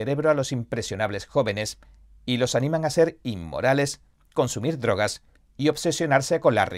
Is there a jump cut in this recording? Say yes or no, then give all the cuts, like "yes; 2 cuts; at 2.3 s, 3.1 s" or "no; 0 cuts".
no; 0 cuts